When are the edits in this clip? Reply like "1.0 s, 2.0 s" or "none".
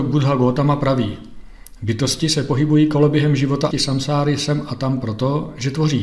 3.7 s